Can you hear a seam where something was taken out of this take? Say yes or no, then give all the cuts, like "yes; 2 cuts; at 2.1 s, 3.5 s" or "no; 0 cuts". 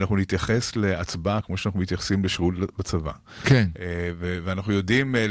no; 0 cuts